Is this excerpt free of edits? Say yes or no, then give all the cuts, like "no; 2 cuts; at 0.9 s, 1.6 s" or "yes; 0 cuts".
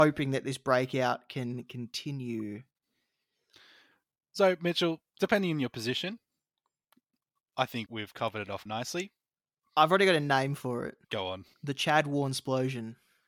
no; 4 cuts; at 7.9 s, 8.7 s, 11.0 s, 11.5 s